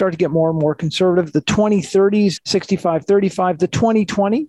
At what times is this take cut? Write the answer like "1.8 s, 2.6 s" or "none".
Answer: 2.4 s